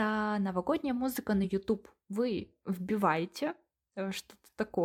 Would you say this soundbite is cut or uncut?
uncut